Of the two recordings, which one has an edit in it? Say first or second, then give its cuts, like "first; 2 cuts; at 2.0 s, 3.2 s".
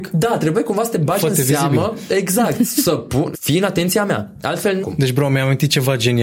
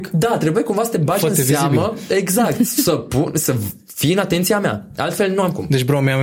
first; 2 cuts; at 3.3 s, 4.8 s